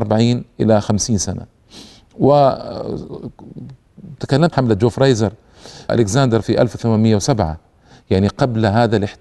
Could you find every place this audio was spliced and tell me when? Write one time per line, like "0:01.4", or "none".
0:04.5
0:05.9
0:06.4